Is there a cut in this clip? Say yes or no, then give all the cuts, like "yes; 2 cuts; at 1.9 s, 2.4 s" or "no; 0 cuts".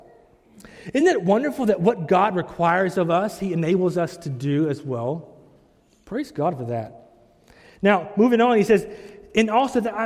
no; 0 cuts